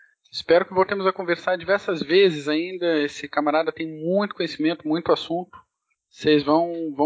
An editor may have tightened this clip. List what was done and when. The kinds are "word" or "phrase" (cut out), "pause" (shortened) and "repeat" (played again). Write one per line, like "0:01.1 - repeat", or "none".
none